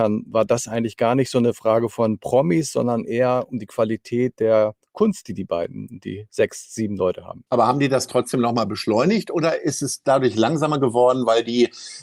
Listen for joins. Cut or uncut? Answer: cut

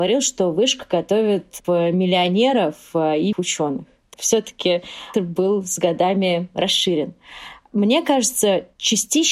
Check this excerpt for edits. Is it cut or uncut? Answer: cut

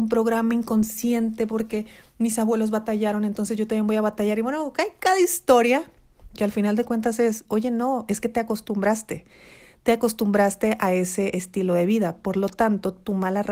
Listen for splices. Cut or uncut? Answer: uncut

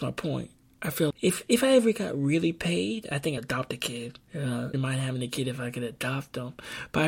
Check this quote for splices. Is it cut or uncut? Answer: cut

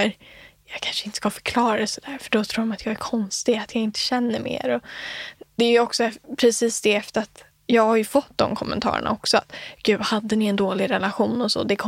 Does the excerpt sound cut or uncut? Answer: uncut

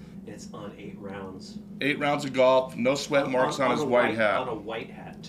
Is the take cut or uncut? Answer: uncut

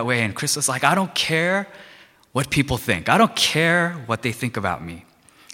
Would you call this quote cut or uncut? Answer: uncut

